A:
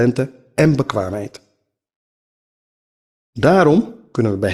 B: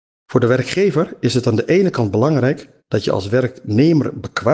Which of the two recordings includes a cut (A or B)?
B